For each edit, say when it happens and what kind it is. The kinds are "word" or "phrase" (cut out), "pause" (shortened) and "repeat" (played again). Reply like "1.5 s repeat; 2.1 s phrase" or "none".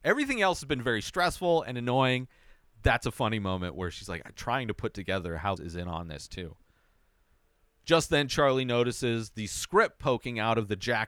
5.6 s phrase